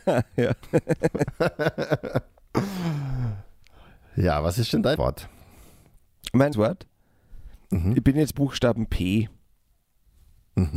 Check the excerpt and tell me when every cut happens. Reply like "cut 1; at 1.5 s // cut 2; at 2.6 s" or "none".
cut 1; at 5.0 s // cut 2; at 6.5 s // cut 3; at 8.3 s